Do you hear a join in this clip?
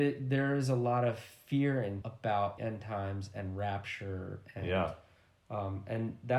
yes; 2 cuts; at 2.0 s, 2.6 s

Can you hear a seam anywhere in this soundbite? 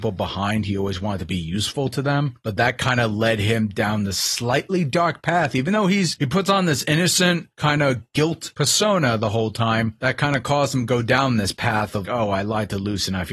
yes; 1 cut; at 12.0 s

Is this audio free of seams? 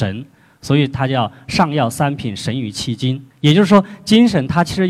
no; 1 cut; at 3.3 s

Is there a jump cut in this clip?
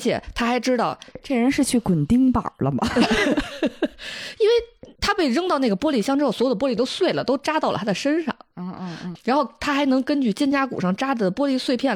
yes; 2 cuts; at 5.0 s, 9.2 s

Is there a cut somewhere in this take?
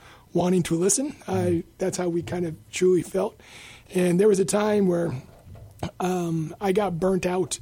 no; 0 cuts

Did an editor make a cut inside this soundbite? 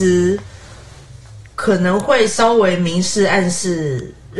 yes; 1 cut; at 1.5 s

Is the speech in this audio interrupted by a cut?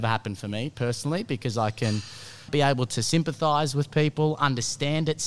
yes; 1 cut; at 2.5 s

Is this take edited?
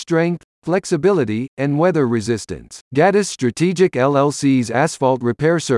yes; 1 cut; at 2.8 s

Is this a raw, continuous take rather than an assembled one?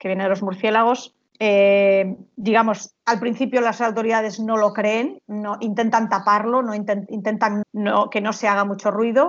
no; 2 cuts; at 1.3 s, 7.6 s

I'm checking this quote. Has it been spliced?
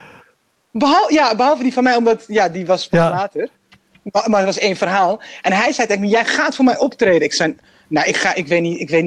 no; 0 cuts

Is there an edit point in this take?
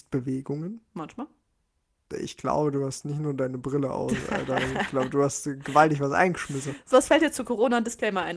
yes; 1 cut; at 6.9 s

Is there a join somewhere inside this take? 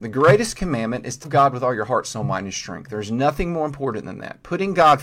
yes; 1 cut; at 1.2 s

